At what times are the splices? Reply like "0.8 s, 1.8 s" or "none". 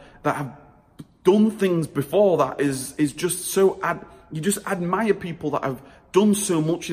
none